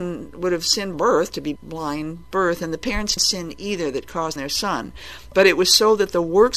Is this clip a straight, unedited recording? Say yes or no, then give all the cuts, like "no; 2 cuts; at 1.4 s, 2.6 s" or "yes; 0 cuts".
no; 5 cuts; at 0.9 s, 1.6 s, 2.3 s, 3.2 s, 4.4 s